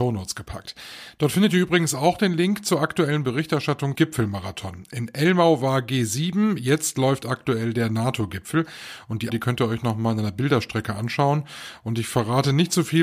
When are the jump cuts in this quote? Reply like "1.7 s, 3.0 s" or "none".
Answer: 4.0 s, 9.3 s